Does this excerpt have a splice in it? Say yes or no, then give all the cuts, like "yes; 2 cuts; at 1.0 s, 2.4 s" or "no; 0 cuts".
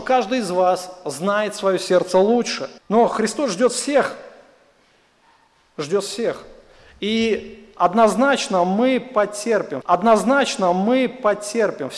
yes; 2 cuts; at 2.8 s, 9.8 s